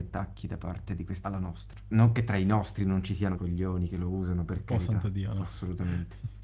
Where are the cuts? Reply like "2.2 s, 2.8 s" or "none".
1.2 s, 3.3 s